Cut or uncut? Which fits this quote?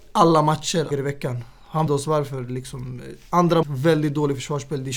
cut